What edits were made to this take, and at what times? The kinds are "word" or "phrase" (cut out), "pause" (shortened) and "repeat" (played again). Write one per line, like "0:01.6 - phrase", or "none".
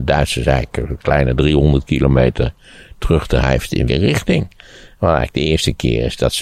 0:03.9 - word